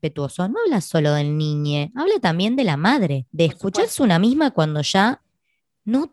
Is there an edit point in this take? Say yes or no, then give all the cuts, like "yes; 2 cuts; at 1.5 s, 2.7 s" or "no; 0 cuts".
no; 0 cuts